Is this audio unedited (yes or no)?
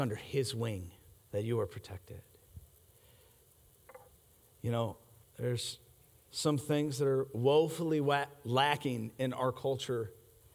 no